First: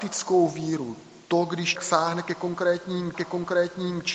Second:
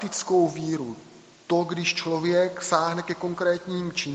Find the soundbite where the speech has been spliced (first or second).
first